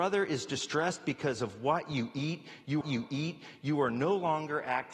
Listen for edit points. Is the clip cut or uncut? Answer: cut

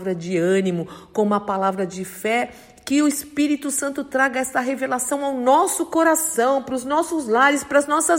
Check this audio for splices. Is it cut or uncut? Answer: uncut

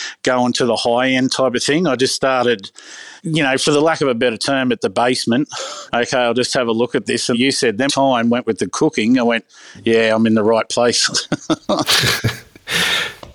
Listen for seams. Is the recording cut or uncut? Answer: cut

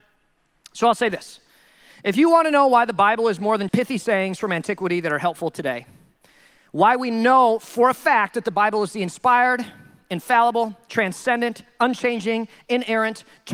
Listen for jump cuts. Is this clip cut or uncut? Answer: cut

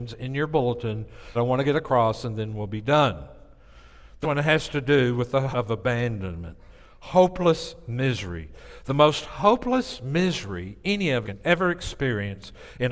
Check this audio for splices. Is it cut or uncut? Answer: cut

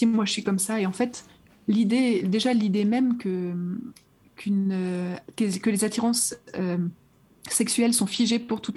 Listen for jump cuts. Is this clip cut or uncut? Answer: uncut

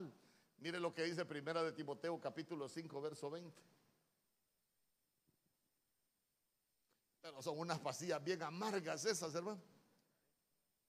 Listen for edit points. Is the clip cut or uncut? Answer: uncut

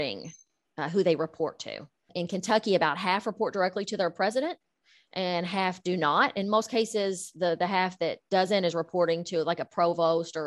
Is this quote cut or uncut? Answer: uncut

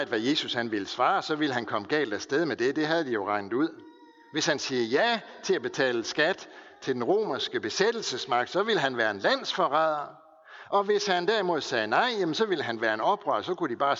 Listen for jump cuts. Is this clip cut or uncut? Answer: uncut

